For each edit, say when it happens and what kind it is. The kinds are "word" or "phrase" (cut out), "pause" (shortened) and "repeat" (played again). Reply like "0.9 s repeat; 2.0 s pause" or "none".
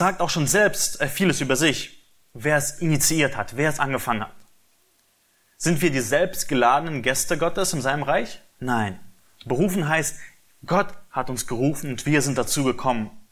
none

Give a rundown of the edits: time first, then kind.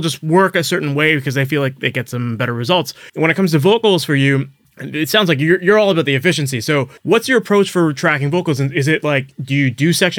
3.1 s pause; 4.6 s pause; 7.0 s pause

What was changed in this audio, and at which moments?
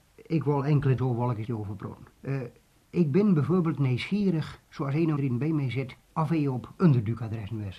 1.0 s word; 1.4 s word; 2.1 s pause; 4.6 s pause; 5.2 s phrase; 6.0 s pause; 6.8 s word

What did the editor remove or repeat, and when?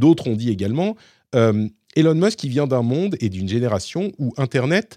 none

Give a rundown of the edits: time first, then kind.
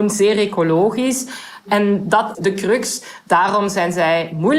2.3 s word

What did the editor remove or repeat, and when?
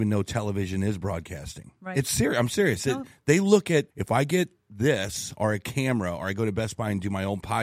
3.9 s pause

